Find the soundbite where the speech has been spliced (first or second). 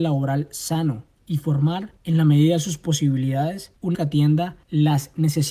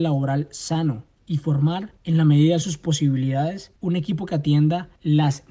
first